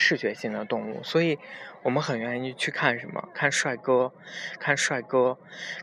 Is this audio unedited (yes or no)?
no